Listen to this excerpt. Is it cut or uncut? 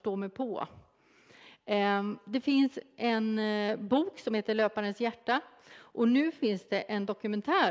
uncut